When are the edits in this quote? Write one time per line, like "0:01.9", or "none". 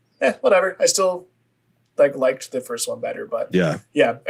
none